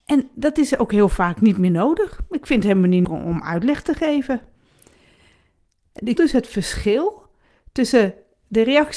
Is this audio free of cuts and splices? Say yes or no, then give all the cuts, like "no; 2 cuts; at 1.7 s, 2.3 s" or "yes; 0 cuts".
no; 2 cuts; at 3.0 s, 6.2 s